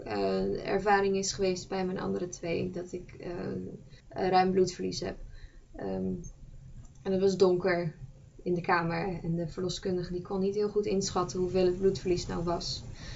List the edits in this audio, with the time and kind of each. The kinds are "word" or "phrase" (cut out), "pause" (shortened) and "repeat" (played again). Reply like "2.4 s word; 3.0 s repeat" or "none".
4.0 s pause